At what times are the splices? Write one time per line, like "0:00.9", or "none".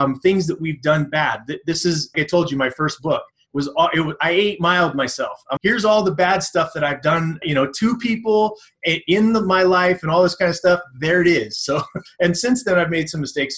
0:02.1
0:05.6
0:07.4
0:12.1